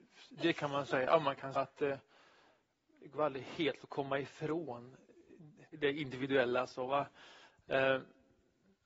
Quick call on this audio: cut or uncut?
cut